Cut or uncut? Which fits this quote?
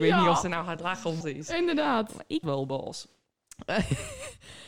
cut